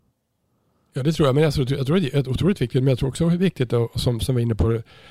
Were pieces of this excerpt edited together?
no; 0 cuts

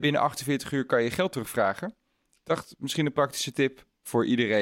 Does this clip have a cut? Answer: no; 0 cuts

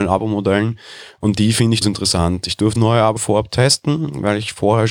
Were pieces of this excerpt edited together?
yes; 3 cuts; at 1.8 s, 2.8 s, 3.2 s

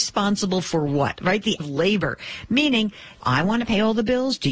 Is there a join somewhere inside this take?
yes; 2 cuts; at 1.6 s, 3.2 s

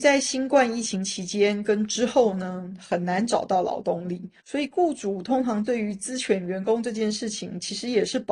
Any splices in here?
yes; 1 cut; at 4.4 s

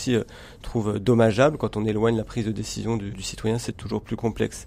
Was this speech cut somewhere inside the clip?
yes; 2 cuts; at 3.1 s, 3.7 s

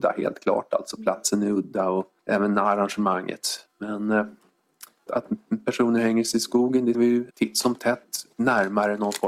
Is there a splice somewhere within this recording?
yes; 5 cuts; at 2.2 s, 5.1 s, 6.9 s, 7.3 s, 8.3 s

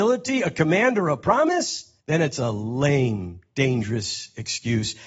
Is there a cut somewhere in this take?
yes; 1 cut; at 2.0 s

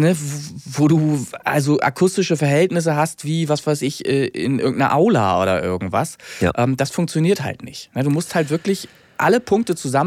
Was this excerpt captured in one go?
yes; 0 cuts

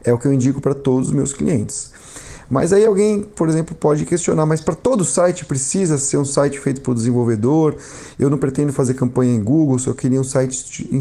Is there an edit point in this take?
no; 0 cuts

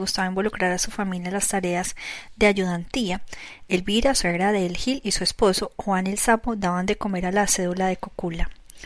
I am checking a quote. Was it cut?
no; 0 cuts

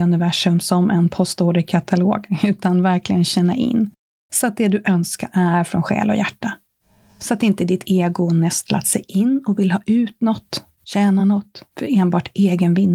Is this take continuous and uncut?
yes; 0 cuts

